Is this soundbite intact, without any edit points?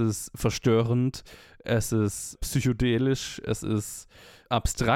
yes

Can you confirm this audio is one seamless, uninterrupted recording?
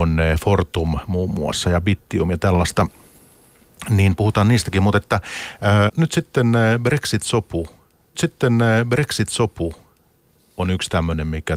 no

